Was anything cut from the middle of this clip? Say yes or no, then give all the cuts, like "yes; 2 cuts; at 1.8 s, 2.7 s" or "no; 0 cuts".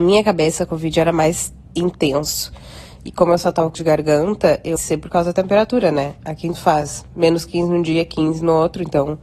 yes; 4 cuts; at 1.7 s, 3.7 s, 4.8 s, 6.5 s